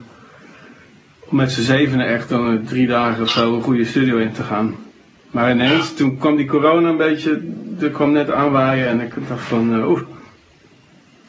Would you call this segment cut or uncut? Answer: uncut